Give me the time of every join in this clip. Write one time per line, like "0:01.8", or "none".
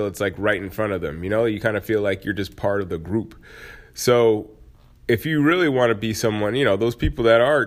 none